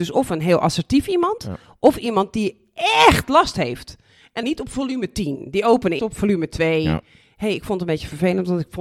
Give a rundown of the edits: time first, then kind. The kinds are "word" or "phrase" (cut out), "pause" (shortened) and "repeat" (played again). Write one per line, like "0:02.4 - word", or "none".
0:04.4 - phrase
0:06.0 - word